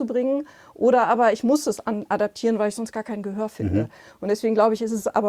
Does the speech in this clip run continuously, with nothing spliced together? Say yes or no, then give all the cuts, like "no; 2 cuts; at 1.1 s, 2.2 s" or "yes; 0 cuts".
yes; 0 cuts